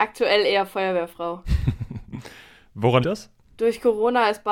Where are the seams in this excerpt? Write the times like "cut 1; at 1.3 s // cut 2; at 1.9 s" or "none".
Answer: cut 1; at 3.0 s